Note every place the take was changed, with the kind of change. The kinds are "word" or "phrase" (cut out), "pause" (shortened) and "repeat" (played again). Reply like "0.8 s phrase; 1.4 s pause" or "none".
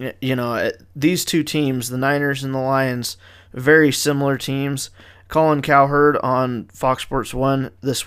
none

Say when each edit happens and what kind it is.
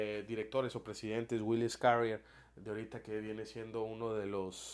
none

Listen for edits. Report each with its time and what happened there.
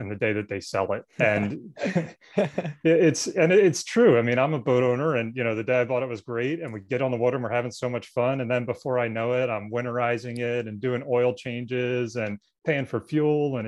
1.1 s pause

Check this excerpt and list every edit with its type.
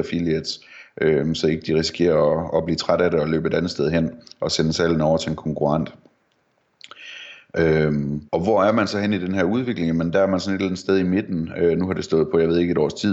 8.3 s pause

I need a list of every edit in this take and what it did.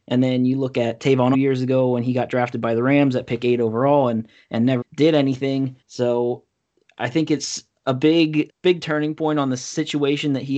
1.3 s phrase; 4.8 s word; 5.8 s pause; 8.5 s word

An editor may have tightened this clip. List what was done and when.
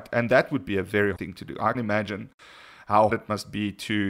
1.2 s word; 1.7 s word; 3.1 s word

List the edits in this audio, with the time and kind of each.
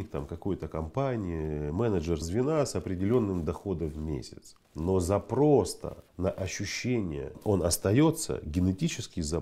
2.2 s word; 4.6 s pause; 6.1 s pause

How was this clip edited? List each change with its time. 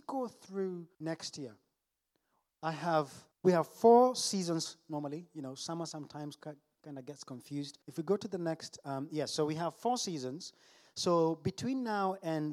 0.9 s pause; 3.3 s pause; 7.8 s pause

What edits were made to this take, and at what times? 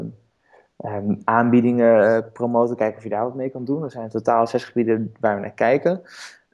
none

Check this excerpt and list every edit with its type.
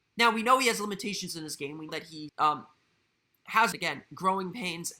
1.9 s word; 2.3 s word; 3.7 s phrase

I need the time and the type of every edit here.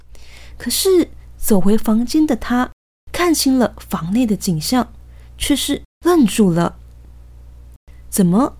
5.9 s pause

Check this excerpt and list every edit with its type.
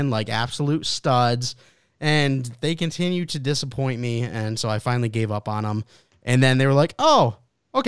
none

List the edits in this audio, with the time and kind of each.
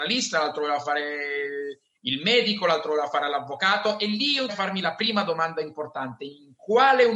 4.5 s word

